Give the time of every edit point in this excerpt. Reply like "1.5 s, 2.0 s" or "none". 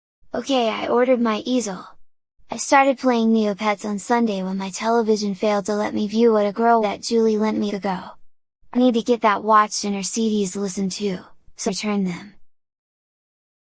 6.8 s, 7.7 s, 8.7 s, 11.7 s